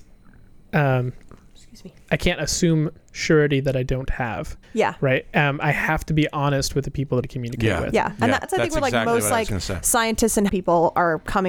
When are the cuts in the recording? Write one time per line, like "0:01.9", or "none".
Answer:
0:02.0
0:04.6
0:07.2
0:10.5